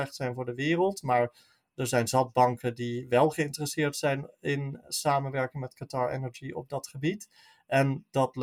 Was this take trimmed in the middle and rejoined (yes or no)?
no